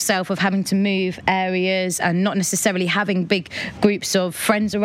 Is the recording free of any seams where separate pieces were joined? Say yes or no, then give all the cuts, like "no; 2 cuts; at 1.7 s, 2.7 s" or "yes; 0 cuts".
yes; 0 cuts